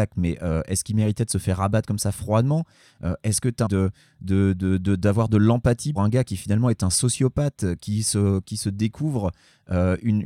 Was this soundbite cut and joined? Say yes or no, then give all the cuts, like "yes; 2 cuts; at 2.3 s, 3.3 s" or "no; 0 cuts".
yes; 2 cuts; at 3.7 s, 6.0 s